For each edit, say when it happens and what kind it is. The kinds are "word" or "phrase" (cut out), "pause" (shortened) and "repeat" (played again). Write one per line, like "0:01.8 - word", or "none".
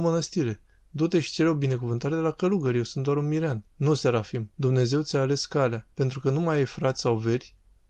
0:03.7 - pause
0:04.5 - pause
0:05.9 - pause